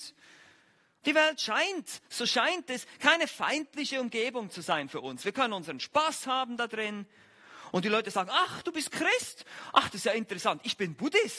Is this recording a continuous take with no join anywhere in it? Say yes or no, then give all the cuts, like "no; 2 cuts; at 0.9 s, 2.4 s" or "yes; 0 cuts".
yes; 0 cuts